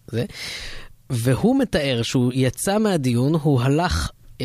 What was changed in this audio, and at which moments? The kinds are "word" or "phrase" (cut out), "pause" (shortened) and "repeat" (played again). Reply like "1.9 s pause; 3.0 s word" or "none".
none